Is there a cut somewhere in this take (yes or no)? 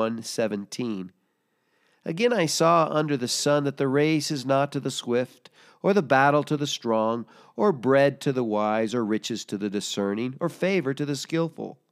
no